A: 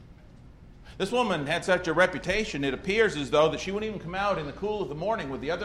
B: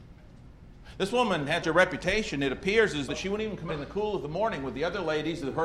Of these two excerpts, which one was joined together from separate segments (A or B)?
B